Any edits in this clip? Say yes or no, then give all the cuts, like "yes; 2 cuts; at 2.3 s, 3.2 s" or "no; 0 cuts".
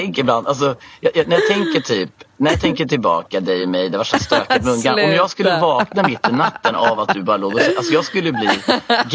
no; 0 cuts